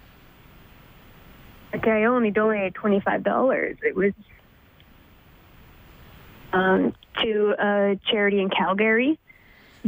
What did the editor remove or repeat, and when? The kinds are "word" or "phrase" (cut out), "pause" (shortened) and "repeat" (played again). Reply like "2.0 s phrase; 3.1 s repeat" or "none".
none